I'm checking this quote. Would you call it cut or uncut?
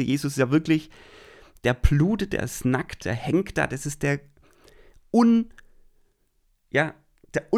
uncut